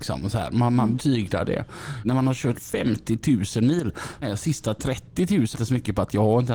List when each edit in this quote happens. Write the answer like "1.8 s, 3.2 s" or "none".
0.9 s, 2.0 s, 2.5 s, 4.2 s, 5.5 s